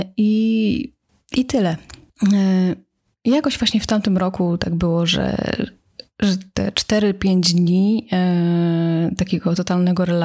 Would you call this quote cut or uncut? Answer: uncut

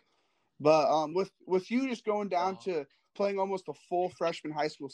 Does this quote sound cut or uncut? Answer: uncut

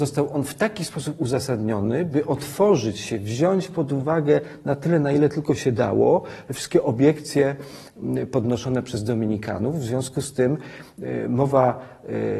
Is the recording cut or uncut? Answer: uncut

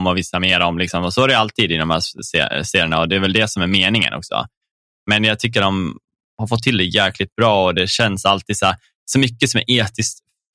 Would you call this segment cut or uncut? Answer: uncut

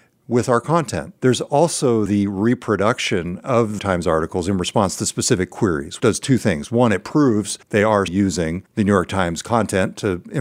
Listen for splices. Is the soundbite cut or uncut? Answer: cut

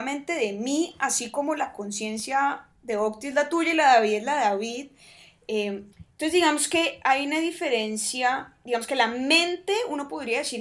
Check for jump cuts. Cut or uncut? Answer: cut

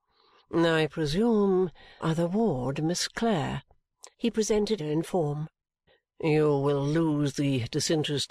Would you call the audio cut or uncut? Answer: cut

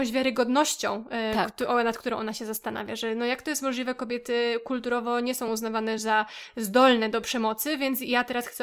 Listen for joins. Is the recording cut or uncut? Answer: uncut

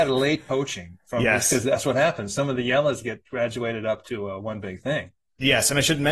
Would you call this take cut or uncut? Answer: uncut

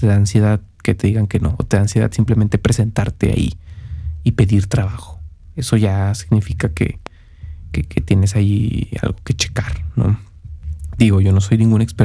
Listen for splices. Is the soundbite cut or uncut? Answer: uncut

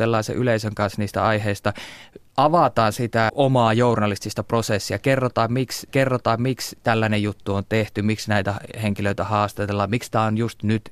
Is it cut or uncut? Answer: cut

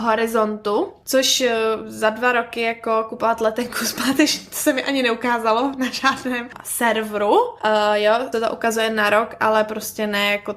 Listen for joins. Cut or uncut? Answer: cut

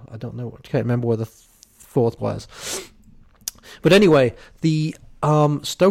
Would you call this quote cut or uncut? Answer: cut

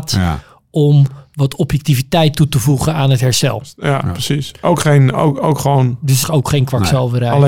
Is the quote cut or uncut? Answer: cut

